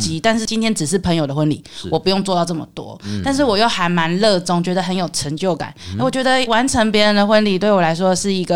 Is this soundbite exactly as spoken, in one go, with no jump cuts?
no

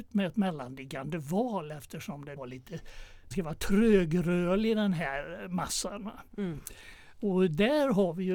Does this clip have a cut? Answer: yes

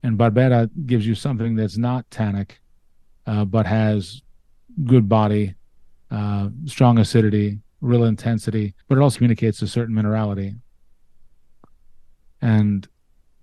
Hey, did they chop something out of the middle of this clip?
yes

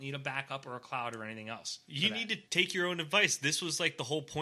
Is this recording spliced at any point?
yes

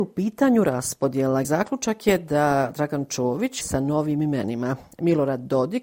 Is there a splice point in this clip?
yes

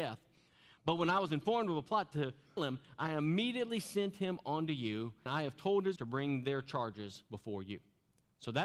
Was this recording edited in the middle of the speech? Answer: yes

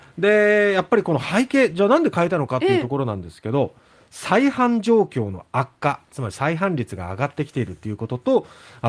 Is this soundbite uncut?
yes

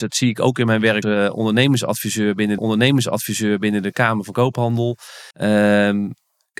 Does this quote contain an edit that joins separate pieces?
yes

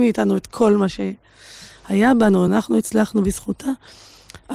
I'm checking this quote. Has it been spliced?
no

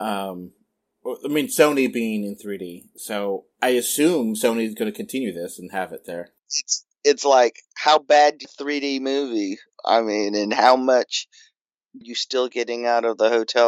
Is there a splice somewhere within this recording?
yes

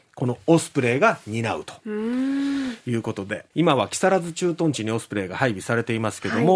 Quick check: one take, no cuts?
no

